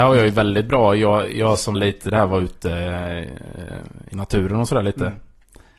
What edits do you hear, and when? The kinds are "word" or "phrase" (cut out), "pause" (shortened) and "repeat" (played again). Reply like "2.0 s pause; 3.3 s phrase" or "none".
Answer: 1.7 s word